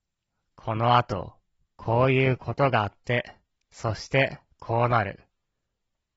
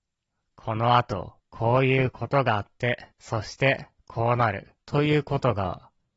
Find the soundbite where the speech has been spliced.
second; 3 cuts; at 1.4 s, 3.1 s, 4.8 s

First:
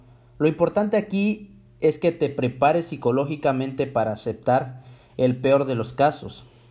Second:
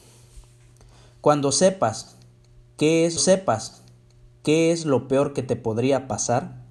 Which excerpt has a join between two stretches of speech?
second; 1 cut; at 3.2 s

